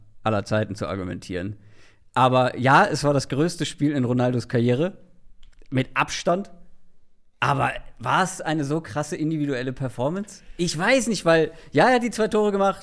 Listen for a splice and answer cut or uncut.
uncut